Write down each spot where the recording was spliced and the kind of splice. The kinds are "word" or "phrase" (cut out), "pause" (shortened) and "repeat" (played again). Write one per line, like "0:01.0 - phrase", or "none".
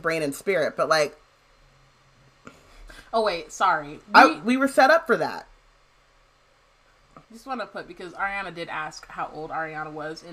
0:07.2 - pause